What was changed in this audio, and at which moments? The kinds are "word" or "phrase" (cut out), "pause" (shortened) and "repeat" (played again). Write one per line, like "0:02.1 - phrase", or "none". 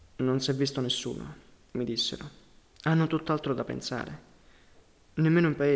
none